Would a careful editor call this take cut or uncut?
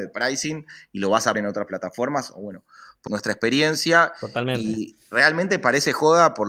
cut